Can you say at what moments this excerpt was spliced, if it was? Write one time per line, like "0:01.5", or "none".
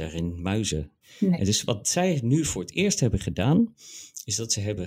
0:01.0